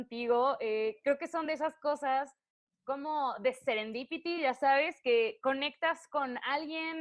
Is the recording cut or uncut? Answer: uncut